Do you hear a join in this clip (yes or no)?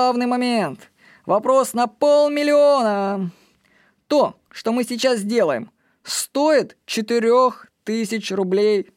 no